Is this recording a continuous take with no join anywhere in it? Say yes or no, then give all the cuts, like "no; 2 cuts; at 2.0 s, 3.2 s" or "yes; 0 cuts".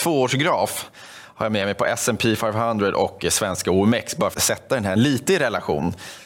no; 2 cuts; at 4.3 s, 5.0 s